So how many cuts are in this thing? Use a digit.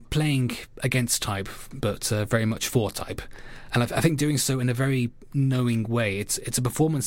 0